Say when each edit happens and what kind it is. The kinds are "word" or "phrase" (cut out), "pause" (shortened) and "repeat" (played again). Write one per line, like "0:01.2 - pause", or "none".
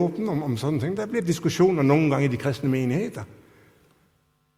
none

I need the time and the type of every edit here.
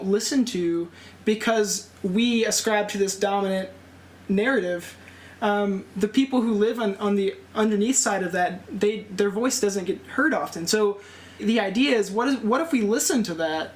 0:11.4 - word

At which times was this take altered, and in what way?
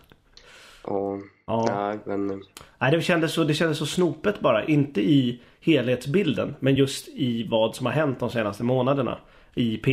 none

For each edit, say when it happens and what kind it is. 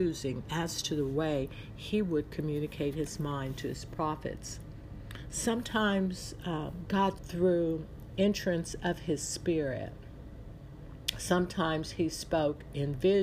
0:07.2 - word

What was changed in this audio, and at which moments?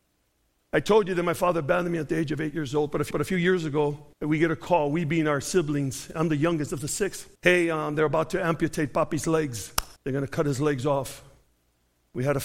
0:03.1 - repeat
0:04.1 - pause
0:07.4 - pause
0:10.0 - pause

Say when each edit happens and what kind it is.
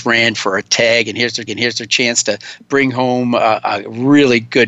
0:01.5 - repeat

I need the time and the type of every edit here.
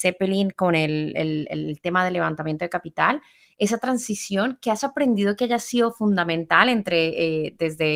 none

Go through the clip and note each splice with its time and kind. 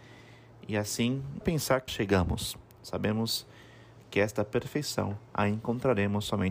0:01.4 - word
0:01.9 - word
0:05.3 - pause

